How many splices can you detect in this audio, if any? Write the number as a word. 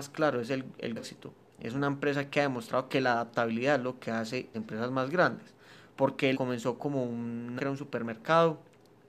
four